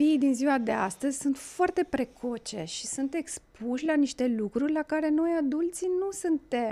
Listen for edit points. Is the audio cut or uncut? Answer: uncut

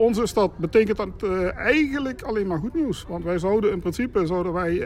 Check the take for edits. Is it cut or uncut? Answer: uncut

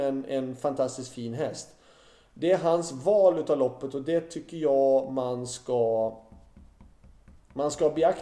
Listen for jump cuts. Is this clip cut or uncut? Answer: uncut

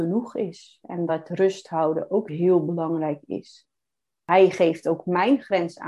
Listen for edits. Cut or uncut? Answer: uncut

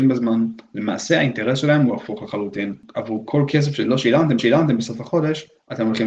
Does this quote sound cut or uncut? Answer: cut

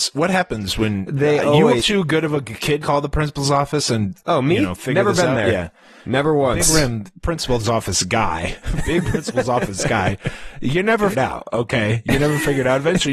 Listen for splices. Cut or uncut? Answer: cut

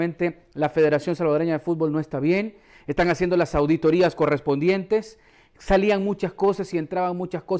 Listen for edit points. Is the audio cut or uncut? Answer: uncut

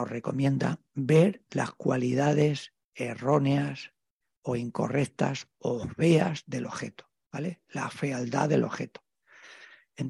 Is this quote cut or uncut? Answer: cut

